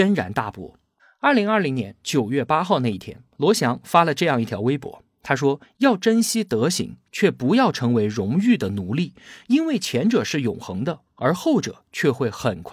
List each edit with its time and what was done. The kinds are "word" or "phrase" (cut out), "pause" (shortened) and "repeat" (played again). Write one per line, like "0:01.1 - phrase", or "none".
0:01.0 - pause
0:05.6 - pause